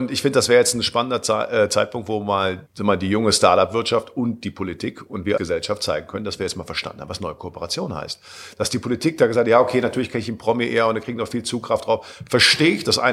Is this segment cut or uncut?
cut